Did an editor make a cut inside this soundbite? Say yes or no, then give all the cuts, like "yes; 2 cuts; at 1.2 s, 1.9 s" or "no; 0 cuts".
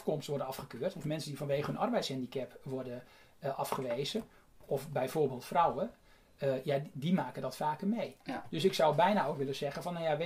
no; 0 cuts